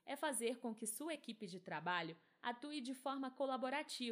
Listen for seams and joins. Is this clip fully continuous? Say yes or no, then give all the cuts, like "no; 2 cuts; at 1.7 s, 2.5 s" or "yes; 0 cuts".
yes; 0 cuts